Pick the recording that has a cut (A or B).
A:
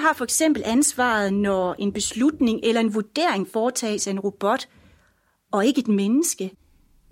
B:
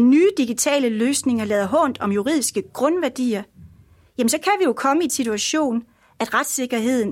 B